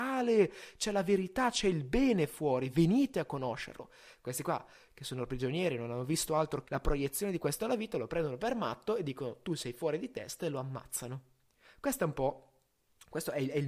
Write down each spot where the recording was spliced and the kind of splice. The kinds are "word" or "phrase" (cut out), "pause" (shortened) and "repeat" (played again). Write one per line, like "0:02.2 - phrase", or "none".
0:06.6 - word
0:07.6 - phrase